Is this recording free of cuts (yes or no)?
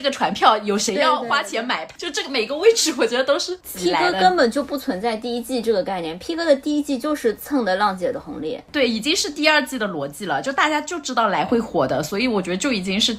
yes